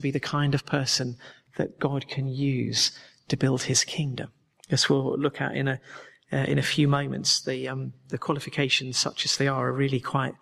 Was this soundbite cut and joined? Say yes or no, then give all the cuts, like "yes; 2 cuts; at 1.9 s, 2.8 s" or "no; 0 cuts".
no; 0 cuts